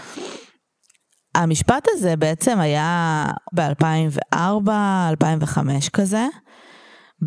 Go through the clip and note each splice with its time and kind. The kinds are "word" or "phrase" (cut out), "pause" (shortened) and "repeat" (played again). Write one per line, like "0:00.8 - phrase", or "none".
0:03.5 - phrase